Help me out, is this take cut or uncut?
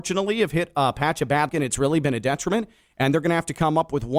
cut